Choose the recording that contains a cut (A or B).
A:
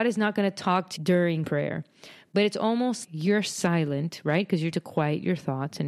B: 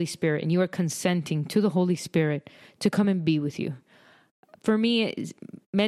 A